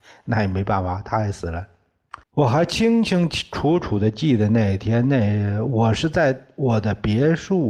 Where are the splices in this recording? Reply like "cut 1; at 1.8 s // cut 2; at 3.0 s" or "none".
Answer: cut 1; at 2.2 s